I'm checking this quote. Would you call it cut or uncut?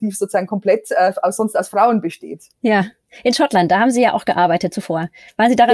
uncut